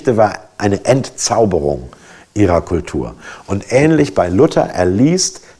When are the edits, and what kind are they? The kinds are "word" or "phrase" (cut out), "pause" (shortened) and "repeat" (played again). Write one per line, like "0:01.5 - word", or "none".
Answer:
none